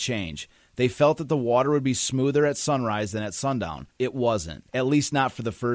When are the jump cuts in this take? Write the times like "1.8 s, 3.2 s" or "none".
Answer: 3.9 s, 4.7 s

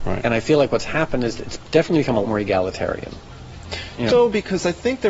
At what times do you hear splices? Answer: 2.2 s, 4.1 s

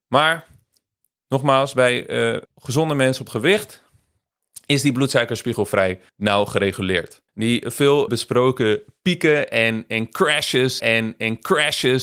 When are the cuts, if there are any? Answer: 2.5 s, 3.3 s, 6.1 s, 7.3 s, 8.1 s, 10.8 s

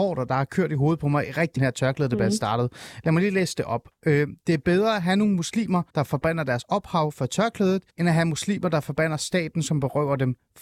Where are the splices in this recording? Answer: 1.6 s, 5.9 s, 7.9 s

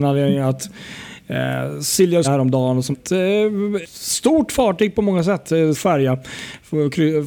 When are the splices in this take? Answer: 2.2 s, 2.9 s, 3.8 s, 5.7 s

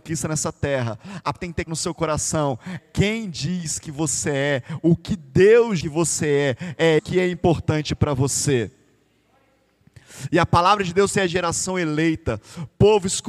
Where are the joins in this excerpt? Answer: 1.3 s, 1.7 s, 2.8 s, 5.8 s, 7.0 s, 11.1 s

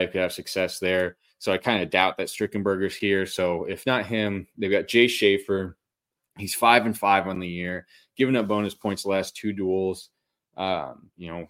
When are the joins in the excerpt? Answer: none

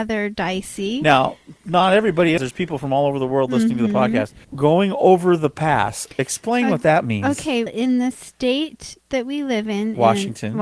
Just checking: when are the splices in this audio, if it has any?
2.4 s, 4.4 s, 7.7 s

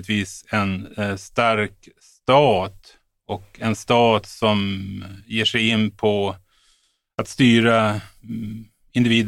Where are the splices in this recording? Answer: none

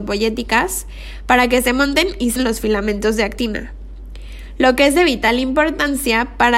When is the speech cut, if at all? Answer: 2.4 s

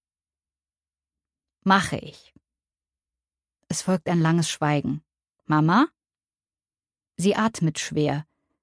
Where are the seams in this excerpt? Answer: 5.3 s

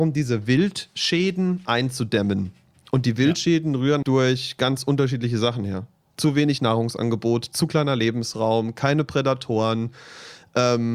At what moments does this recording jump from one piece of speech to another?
4.0 s

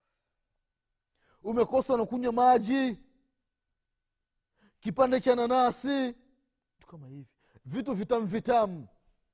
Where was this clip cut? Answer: 6.8 s

